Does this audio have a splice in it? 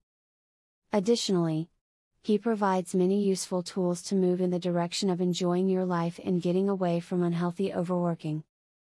no; 0 cuts

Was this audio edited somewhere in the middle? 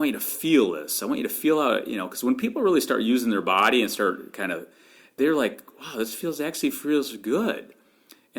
no; 0 cuts

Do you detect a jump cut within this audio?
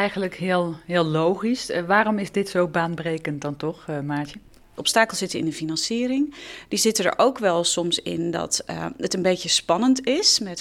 no; 0 cuts

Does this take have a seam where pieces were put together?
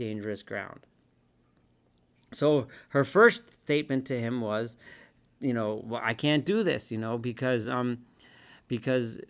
no; 0 cuts

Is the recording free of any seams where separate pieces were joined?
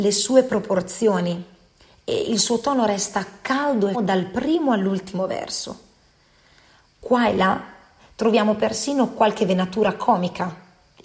no; 1 cut; at 3.9 s

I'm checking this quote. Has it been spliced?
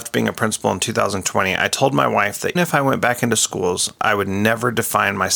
yes; 1 cut; at 2.6 s

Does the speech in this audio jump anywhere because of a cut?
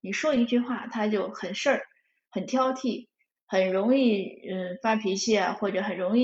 no; 0 cuts

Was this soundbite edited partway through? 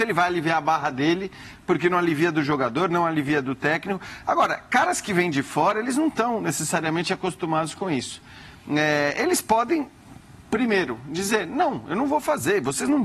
no; 0 cuts

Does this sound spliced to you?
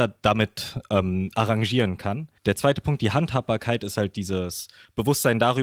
yes; 1 cut; at 2.4 s

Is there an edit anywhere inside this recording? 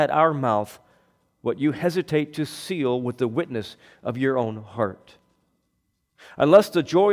no; 0 cuts

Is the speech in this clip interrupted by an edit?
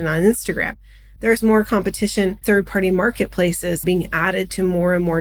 yes; 2 cuts; at 2.4 s, 3.8 s

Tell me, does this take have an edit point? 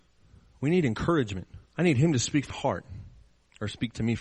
yes; 2 cuts; at 1.7 s, 2.5 s

